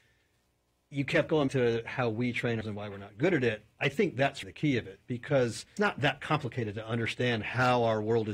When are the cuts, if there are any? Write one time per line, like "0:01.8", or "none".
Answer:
0:01.5
0:02.6
0:04.4
0:05.8